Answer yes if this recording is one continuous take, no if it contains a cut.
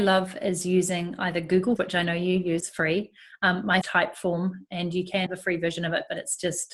no